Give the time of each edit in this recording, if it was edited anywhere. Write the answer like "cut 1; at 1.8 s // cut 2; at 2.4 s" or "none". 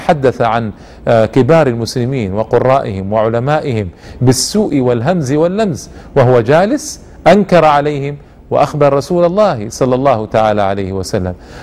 none